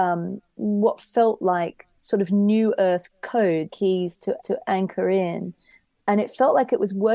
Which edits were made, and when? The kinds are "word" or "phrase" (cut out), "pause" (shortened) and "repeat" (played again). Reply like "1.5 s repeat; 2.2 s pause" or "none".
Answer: 3.7 s phrase; 4.4 s repeat